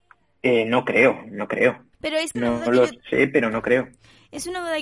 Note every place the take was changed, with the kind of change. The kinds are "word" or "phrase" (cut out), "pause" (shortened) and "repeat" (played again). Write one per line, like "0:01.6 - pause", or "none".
0:01.9 - pause
0:02.3 - phrase